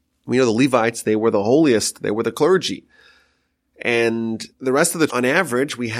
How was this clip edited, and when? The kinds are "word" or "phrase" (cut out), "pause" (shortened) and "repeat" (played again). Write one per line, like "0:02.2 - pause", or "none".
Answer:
0:04.5 - pause
0:05.1 - word